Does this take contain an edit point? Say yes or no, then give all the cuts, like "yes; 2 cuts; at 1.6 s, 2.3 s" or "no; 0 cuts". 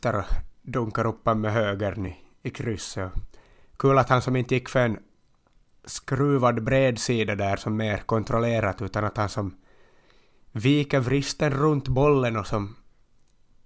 no; 0 cuts